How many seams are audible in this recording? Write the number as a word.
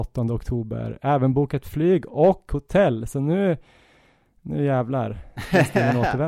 zero